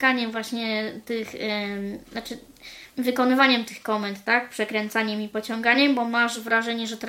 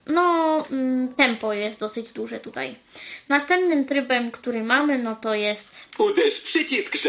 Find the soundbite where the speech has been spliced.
first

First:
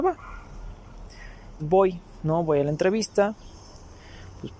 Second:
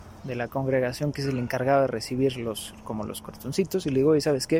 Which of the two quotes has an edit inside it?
first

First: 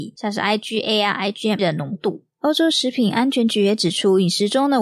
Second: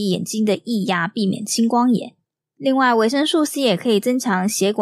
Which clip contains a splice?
first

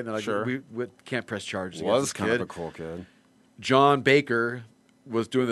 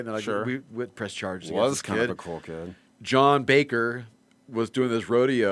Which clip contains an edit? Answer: second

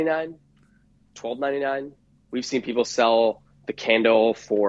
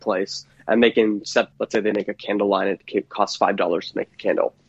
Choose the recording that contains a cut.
second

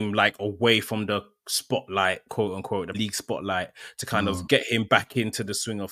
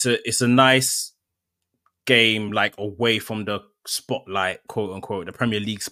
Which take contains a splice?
first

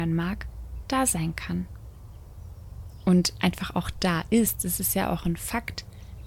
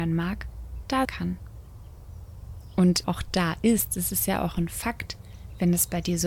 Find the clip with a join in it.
second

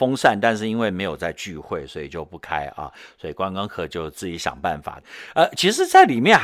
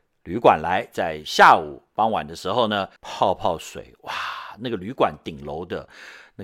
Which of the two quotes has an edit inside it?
second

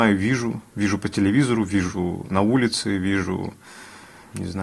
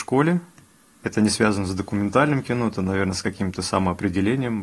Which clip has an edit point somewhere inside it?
second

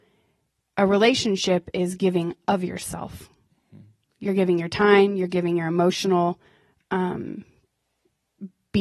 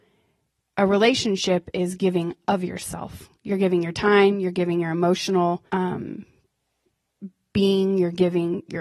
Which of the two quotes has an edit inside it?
second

